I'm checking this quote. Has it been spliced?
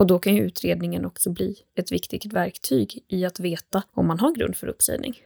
yes; 1 cut; at 3.9 s

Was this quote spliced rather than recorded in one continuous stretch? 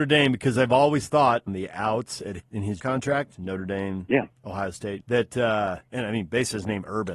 yes; 5 cuts; at 1.5 s, 2.4 s, 2.8 s, 4.3 s, 5.0 s

